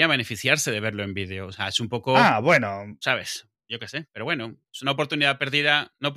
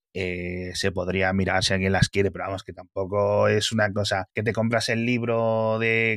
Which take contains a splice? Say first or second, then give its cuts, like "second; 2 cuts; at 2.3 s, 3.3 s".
first; 1 cut; at 4.7 s